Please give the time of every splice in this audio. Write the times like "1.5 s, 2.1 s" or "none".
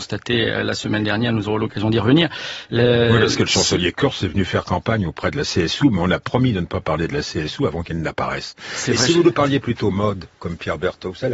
none